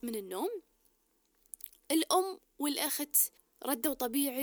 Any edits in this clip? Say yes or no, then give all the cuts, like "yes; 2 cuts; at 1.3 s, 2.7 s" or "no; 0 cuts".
yes; 1 cut; at 3.4 s